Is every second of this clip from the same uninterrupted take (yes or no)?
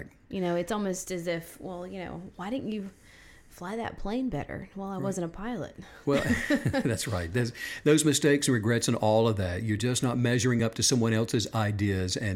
yes